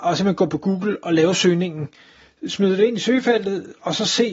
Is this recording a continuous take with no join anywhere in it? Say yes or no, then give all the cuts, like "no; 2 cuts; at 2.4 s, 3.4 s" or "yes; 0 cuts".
yes; 0 cuts